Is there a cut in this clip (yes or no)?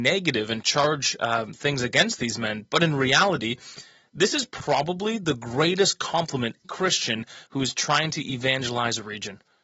yes